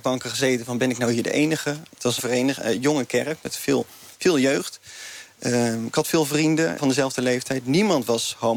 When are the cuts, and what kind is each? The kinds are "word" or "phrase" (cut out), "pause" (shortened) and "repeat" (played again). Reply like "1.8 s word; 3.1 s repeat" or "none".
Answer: 2.2 s phrase; 6.8 s word